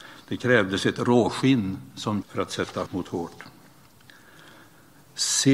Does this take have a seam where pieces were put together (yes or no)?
yes